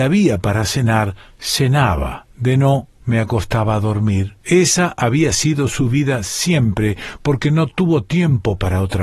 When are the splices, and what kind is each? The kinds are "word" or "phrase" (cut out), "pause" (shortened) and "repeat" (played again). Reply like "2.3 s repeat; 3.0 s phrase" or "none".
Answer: 2.3 s pause; 2.9 s pause; 4.4 s pause